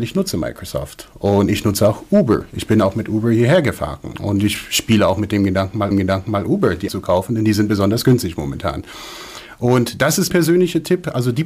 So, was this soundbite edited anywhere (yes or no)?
yes